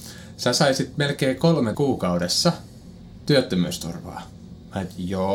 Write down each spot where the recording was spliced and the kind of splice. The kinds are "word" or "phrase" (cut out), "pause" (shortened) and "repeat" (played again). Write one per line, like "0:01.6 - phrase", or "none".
0:01.7 - word